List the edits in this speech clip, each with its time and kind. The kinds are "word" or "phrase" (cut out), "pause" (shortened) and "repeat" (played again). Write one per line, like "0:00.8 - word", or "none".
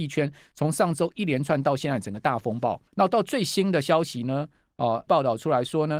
0:02.9 - pause
0:05.1 - phrase